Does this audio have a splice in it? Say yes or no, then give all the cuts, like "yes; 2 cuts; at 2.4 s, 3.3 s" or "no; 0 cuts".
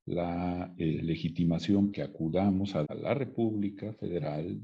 yes; 2 cuts; at 1.9 s, 2.8 s